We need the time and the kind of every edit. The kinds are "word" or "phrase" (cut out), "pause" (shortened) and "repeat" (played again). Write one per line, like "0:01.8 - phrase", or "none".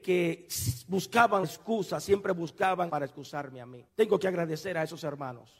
0:01.4 - word
0:02.9 - word
0:03.9 - pause